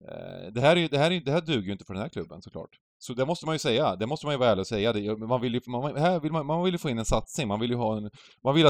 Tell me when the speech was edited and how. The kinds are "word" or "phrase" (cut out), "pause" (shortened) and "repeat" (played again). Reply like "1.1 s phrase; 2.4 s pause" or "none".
2.9 s pause